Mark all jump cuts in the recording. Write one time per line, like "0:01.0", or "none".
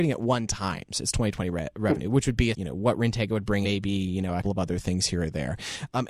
0:02.5
0:03.6
0:04.4